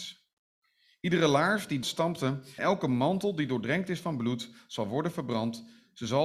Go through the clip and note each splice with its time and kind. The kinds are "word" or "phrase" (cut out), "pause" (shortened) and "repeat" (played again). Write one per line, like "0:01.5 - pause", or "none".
0:01.8 - word
0:02.6 - word